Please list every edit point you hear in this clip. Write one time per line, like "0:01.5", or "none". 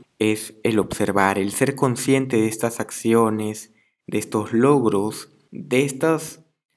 none